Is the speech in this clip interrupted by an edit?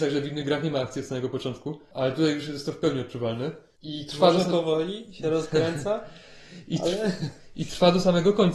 no; 0 cuts

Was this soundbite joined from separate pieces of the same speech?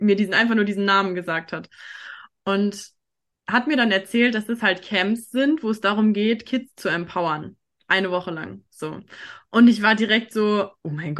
no; 0 cuts

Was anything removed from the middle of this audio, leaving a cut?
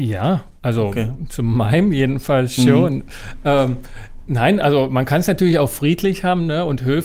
no; 0 cuts

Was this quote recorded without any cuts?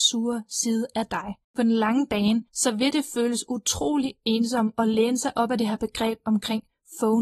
no; 1 cut; at 1.4 s

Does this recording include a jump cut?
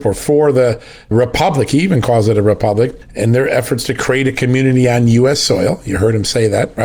no; 0 cuts

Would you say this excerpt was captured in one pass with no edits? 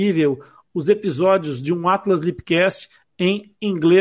yes; 0 cuts

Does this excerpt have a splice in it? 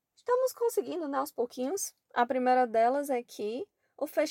yes; 1 cut; at 2.0 s

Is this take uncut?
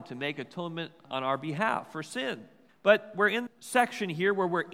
no; 3 cuts; at 1.1 s, 2.7 s, 3.5 s

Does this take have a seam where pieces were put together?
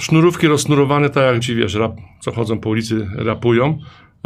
yes; 1 cut; at 1.4 s

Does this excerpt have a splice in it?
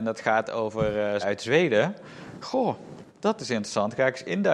yes; 2 cuts; at 1.2 s, 3.1 s

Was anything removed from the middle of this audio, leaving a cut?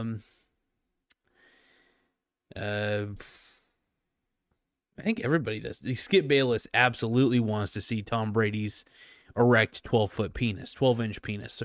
no; 0 cuts

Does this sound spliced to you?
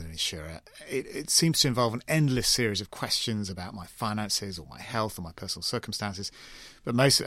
no; 0 cuts

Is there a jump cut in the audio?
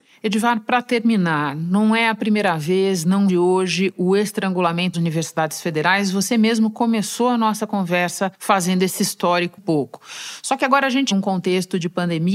yes; 5 cuts; at 3.3 s, 4.9 s, 8.3 s, 9.6 s, 11.1 s

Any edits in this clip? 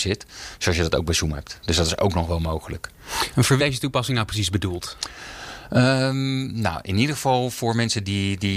yes; 1 cut; at 3.6 s

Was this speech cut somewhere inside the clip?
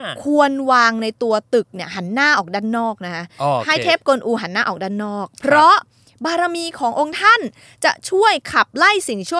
no; 0 cuts

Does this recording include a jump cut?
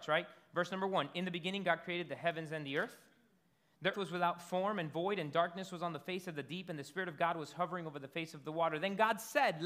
yes; 1 cut; at 3.9 s

